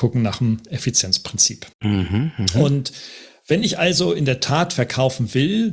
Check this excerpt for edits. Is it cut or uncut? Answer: cut